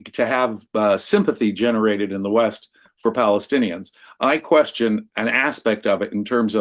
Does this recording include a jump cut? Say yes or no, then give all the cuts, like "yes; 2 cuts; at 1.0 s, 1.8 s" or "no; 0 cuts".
no; 0 cuts